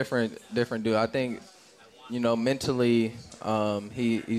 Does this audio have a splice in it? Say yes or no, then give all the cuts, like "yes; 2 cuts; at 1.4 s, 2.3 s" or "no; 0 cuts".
no; 0 cuts